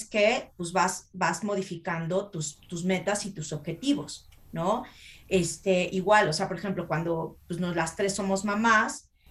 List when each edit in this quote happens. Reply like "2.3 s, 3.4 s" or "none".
none